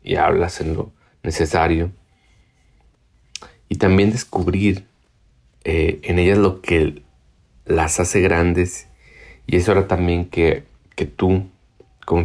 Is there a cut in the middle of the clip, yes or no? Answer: no